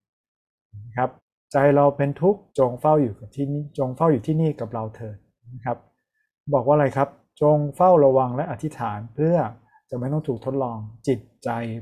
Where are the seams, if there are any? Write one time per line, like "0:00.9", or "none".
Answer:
0:01.2
0:02.5